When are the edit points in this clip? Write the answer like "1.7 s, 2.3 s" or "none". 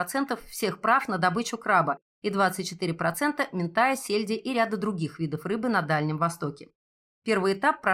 none